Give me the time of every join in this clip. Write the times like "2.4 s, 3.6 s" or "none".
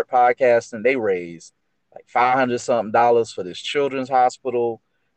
none